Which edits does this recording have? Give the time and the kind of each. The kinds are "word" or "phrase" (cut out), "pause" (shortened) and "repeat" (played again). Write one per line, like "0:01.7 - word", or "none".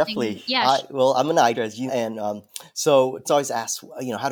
0:01.5 - word
0:01.9 - word
0:03.2 - word